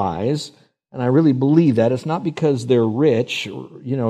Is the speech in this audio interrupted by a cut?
no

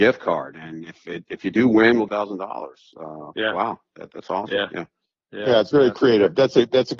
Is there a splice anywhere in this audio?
yes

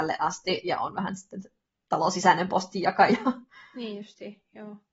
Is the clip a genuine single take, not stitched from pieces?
yes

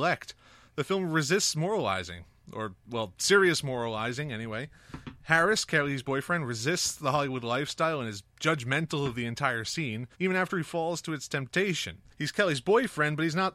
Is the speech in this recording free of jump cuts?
no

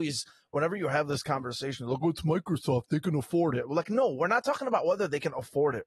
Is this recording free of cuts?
yes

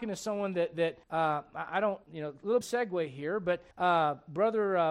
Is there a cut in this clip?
yes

